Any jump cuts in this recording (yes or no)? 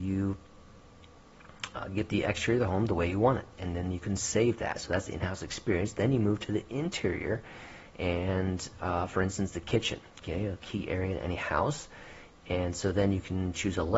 no